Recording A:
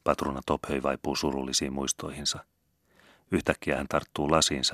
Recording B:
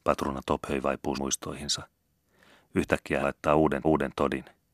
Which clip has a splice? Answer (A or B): B